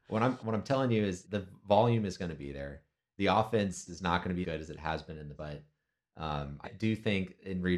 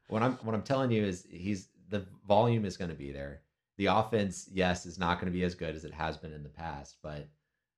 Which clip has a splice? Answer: first; 5 cuts; at 1.2 s, 3.9 s, 4.4 s, 5.3 s, 6.6 s

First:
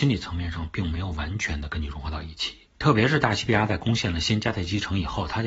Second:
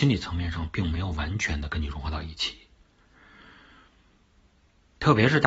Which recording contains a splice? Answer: first; 1 cut; at 2.7 s

